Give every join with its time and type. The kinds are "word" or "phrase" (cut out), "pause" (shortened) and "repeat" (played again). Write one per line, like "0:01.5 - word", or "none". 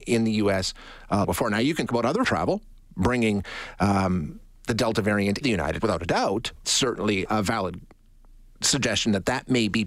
0:01.2 - word
0:01.9 - word
0:02.2 - word
0:05.4 - word
0:05.8 - word
0:06.6 - word
0:07.3 - word